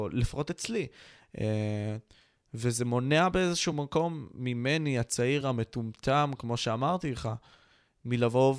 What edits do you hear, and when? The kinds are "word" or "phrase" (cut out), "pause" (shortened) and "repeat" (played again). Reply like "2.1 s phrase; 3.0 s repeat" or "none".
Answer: none

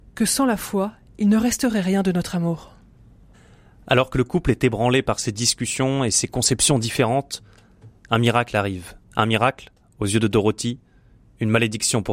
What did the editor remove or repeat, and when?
9.0 s pause

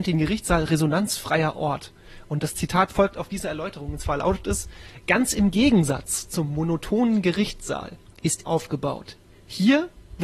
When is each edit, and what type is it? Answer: 8.4 s word

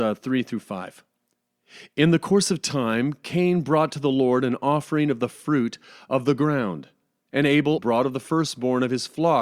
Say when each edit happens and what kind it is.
7.8 s word

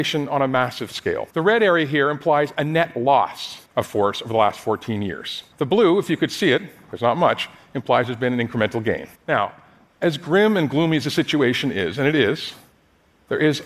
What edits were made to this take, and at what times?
1.3 s pause; 3.7 s pause; 5.5 s pause; 9.1 s pause

